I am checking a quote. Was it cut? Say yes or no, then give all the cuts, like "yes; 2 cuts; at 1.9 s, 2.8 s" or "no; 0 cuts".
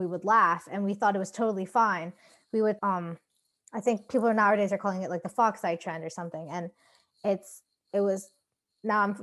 yes; 1 cut; at 2.8 s